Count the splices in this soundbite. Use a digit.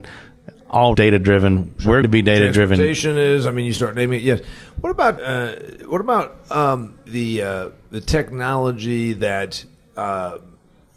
4